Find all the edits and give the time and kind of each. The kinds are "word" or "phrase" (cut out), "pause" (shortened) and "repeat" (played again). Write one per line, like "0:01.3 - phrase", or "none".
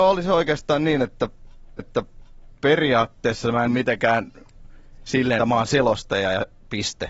0:01.8 - repeat
0:03.7 - word
0:05.4 - word